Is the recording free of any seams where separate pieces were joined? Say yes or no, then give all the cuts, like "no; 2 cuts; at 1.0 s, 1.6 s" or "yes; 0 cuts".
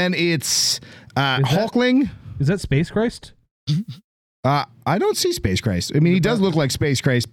yes; 0 cuts